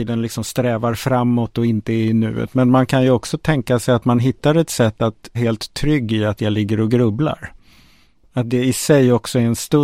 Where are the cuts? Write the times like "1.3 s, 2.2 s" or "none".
5.3 s